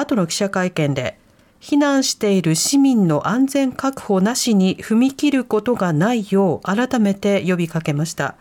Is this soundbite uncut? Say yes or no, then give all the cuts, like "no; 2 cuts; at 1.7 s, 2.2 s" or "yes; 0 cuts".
yes; 0 cuts